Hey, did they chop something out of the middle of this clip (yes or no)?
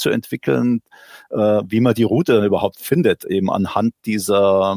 no